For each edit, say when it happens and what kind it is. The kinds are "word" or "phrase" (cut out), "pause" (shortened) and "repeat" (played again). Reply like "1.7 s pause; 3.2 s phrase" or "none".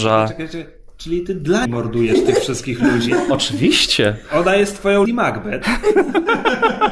1.7 s word; 5.1 s word